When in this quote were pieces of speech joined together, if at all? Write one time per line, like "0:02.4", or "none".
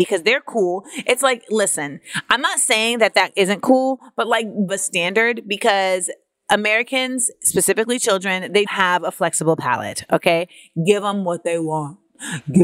0:04.7
0:08.7